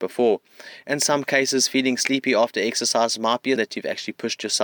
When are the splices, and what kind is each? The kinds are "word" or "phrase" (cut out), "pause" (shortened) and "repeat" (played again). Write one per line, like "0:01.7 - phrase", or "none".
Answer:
0:03.6 - word